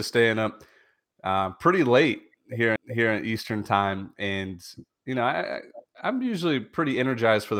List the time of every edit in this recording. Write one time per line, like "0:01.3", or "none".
0:02.8